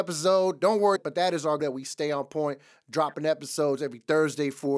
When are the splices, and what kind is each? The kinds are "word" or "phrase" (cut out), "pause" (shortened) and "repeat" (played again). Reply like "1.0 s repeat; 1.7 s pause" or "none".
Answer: 1.0 s word; 1.6 s word

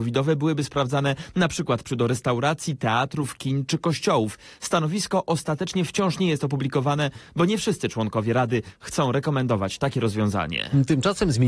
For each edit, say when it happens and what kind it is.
1.9 s word

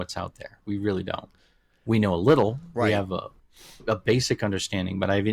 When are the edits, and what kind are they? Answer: none

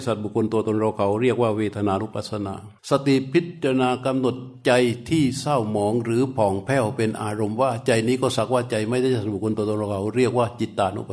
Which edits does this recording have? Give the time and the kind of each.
2.8 s pause

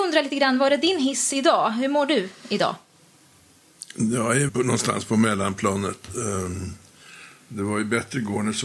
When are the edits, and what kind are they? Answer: 4.5 s word

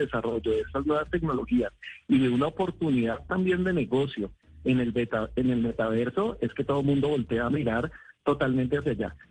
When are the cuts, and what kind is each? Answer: none

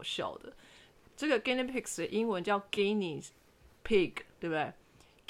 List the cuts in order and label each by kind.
none

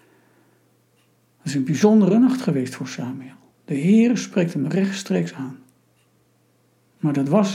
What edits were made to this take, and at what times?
none

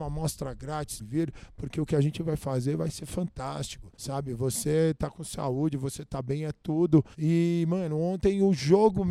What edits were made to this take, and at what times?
1.0 s phrase; 3.9 s pause; 7.1 s pause

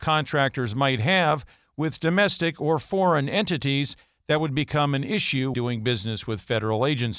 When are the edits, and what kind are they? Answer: 5.5 s word

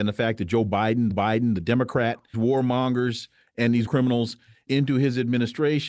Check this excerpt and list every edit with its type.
1.1 s repeat; 2.3 s phrase; 3.9 s word; 4.7 s word

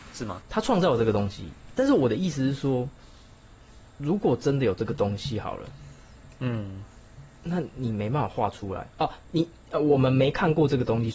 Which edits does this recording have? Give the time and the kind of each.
7.3 s pause; 8.9 s pause

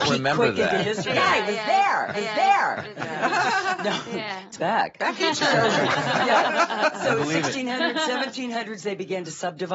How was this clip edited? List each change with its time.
1.1 s word; 2.1 s repeat; 4.6 s phrase; 5.2 s phrase

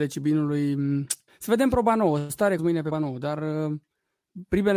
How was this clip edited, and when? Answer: 1.3 s pause; 2.6 s word; 2.9 s word

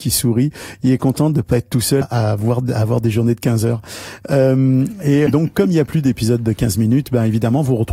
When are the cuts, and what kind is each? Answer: 2.0 s word; 5.3 s word

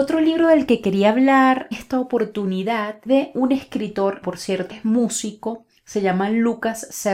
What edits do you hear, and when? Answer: 1.7 s word; 3.1 s word; 4.2 s word; 4.7 s word

